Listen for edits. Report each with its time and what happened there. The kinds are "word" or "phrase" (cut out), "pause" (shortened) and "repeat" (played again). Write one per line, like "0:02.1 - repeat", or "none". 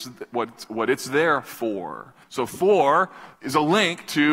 0:02.2 - pause
0:03.3 - pause